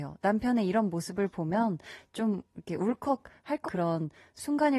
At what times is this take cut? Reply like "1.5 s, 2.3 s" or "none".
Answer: 3.6 s